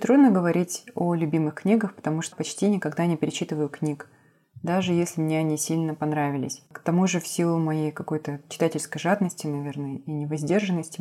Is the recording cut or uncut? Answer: cut